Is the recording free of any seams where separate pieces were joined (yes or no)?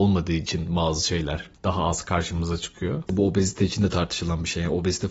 yes